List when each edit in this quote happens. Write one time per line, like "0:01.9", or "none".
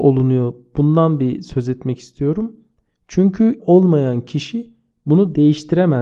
0:03.6